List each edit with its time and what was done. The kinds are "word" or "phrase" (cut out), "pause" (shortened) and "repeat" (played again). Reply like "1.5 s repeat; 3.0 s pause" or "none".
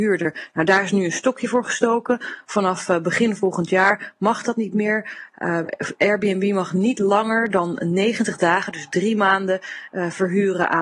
none